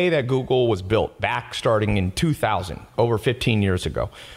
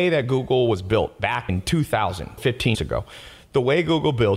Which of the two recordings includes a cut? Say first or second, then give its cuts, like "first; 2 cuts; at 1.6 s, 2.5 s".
second; 3 cuts; at 1.5 s, 2.4 s, 2.7 s